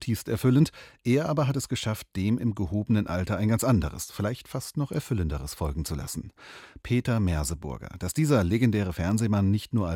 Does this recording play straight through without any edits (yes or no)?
yes